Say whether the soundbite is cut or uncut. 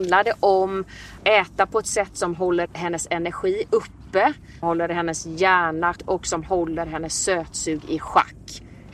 cut